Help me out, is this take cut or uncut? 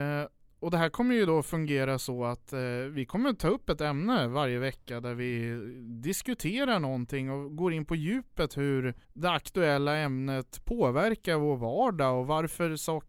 cut